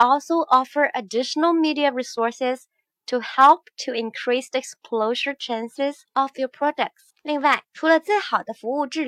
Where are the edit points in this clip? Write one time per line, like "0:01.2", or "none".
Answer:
0:07.7